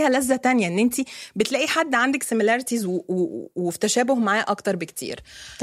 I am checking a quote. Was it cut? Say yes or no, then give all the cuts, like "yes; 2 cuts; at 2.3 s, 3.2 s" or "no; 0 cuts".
no; 0 cuts